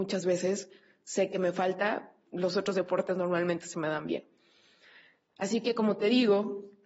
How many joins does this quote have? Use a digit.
1